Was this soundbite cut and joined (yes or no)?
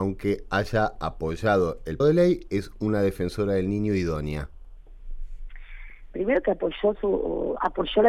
yes